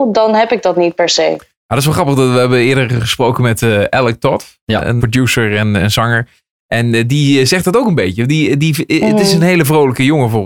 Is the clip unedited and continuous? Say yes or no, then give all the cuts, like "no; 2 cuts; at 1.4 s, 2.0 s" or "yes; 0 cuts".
no; 1 cut; at 5.0 s